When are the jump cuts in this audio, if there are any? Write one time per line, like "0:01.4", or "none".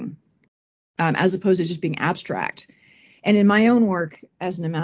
none